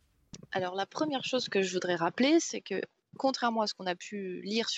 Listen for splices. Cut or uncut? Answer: uncut